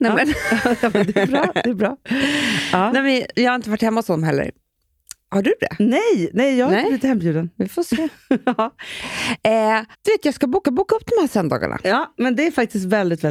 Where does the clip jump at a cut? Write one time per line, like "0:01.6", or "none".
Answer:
0:09.9
0:10.6